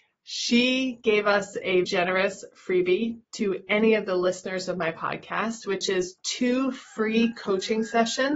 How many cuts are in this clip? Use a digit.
2